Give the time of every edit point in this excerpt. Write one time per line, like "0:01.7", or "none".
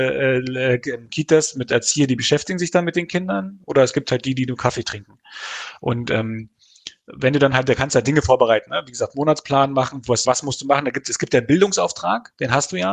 0:10.2